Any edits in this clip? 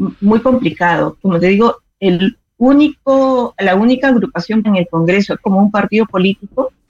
yes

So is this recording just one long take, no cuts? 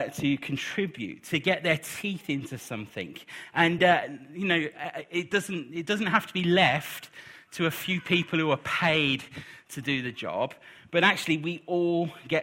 yes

